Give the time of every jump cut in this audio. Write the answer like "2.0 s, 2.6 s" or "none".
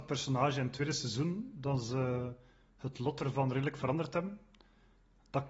none